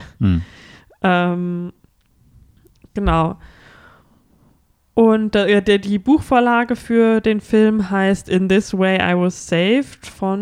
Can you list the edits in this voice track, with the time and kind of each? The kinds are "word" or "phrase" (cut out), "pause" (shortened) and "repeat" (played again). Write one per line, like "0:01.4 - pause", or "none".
none